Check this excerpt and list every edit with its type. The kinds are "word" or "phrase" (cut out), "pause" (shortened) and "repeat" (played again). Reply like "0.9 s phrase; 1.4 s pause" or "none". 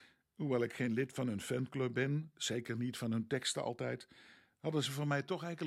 none